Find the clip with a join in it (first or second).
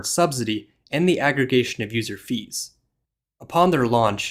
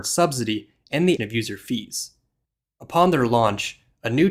second